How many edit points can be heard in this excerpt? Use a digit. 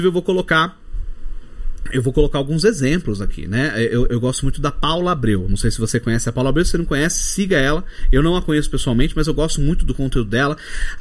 1